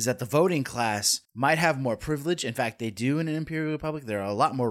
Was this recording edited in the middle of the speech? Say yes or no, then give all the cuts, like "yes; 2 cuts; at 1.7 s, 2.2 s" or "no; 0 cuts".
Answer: yes; 1 cut; at 1.2 s